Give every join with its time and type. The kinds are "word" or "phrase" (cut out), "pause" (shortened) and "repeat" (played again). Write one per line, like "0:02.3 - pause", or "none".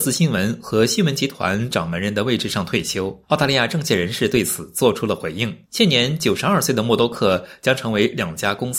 0:03.2 - pause
0:05.6 - pause